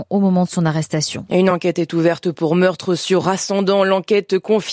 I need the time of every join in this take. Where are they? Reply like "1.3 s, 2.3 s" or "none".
none

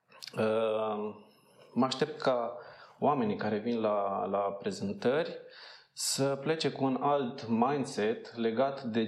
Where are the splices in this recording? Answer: none

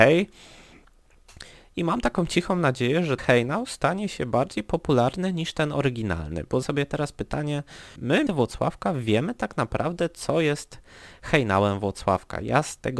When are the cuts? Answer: 3.2 s, 6.6 s, 8.0 s, 8.3 s

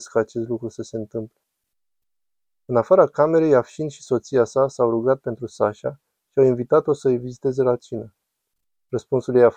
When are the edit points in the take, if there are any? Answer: none

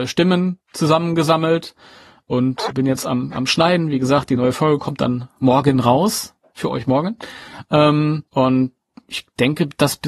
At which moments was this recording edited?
2.7 s, 8.3 s

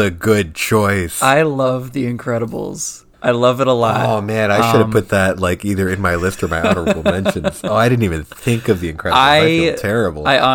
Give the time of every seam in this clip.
3.1 s

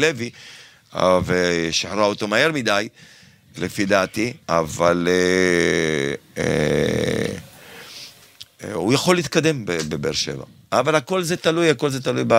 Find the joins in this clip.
4.4 s

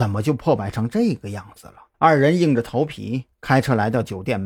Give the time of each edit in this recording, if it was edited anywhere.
1.9 s

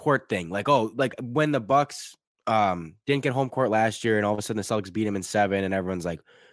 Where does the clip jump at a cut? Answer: none

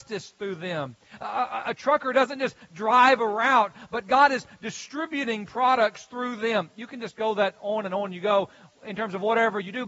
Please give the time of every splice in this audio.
none

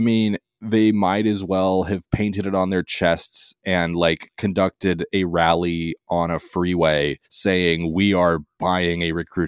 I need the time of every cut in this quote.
7.3 s

